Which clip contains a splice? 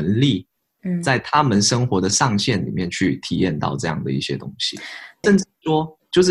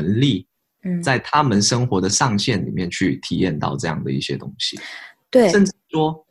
first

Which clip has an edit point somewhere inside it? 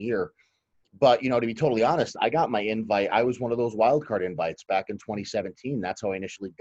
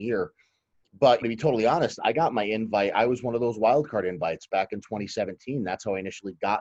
second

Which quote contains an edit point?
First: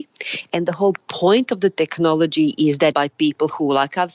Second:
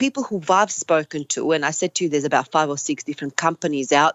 first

